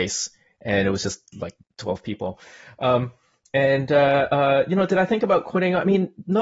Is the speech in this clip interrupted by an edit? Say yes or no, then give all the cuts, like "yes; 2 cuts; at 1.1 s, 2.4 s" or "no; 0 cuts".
no; 0 cuts